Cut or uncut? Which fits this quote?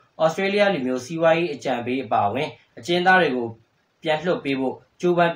uncut